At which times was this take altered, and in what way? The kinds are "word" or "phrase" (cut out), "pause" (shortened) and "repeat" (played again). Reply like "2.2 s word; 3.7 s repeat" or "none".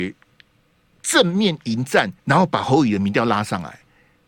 2.2 s pause